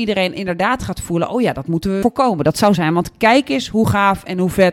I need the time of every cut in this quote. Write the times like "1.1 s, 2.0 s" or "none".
2.0 s, 2.8 s